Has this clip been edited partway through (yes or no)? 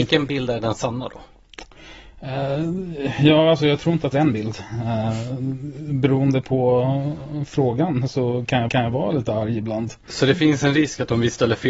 yes